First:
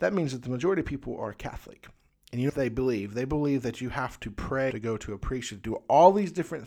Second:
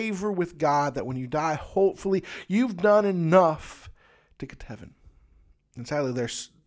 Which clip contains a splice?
first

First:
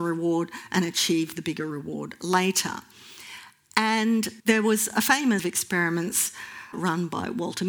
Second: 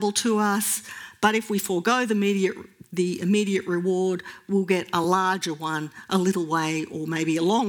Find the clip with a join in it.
first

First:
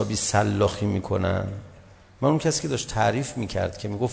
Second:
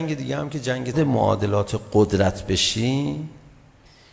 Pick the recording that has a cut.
second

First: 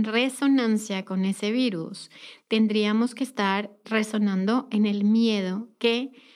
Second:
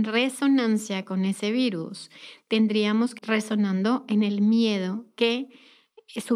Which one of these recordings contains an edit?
second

